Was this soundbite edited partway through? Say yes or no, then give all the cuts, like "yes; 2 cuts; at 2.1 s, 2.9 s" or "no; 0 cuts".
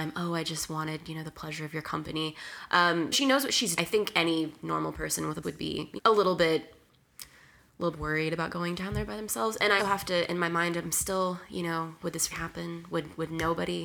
yes; 8 cuts; at 3.1 s, 3.8 s, 5.4 s, 6.0 s, 7.9 s, 9.8 s, 10.8 s, 12.3 s